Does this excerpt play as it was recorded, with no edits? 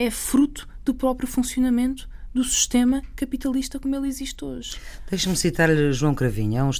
yes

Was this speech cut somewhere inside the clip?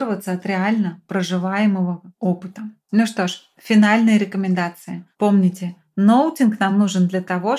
no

